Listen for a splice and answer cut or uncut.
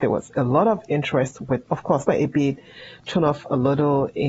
cut